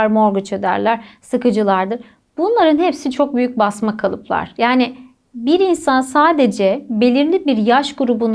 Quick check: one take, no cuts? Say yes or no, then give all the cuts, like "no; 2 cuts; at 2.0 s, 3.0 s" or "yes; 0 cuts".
yes; 0 cuts